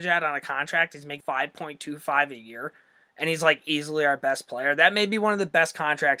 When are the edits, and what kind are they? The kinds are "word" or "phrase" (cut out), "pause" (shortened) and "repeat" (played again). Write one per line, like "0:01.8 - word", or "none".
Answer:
0:01.2 - word